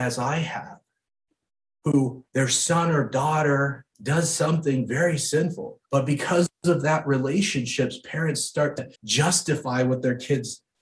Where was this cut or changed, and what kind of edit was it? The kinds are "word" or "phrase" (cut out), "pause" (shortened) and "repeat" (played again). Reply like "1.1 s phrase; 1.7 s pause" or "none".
2.3 s pause; 3.9 s pause; 5.9 s pause; 9.0 s pause